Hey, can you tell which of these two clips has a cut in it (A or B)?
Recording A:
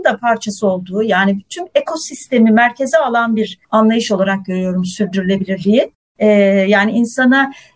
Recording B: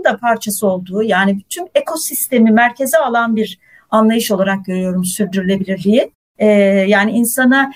A